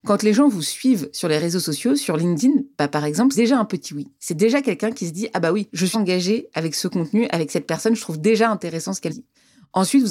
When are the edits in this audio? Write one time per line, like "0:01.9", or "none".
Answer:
0:03.3
0:05.9
0:09.1